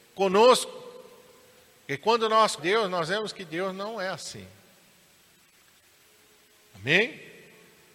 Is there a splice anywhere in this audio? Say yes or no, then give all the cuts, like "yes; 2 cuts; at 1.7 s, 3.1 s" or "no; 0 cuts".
yes; 1 cut; at 2.6 s